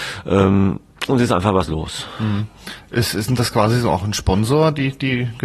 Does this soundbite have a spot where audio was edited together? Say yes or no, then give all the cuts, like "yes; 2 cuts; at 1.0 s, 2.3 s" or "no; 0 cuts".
no; 0 cuts